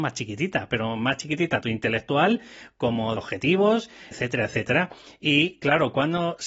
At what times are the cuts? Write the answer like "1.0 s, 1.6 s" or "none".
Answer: 1.6 s, 3.2 s, 4.1 s